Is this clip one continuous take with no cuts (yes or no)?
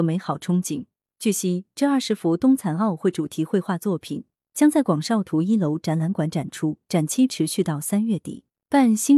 yes